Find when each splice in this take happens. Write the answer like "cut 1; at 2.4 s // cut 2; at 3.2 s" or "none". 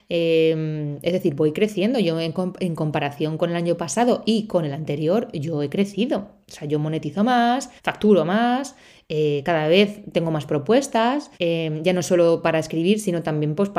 cut 1; at 7.8 s // cut 2; at 11.3 s